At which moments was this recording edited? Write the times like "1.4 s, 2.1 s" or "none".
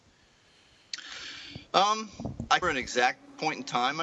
2.6 s